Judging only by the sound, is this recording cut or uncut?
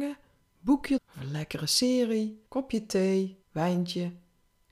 cut